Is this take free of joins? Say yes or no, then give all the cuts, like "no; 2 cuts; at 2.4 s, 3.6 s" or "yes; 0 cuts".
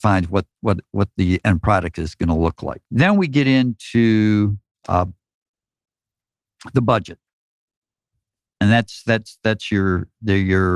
no; 1 cut; at 2.8 s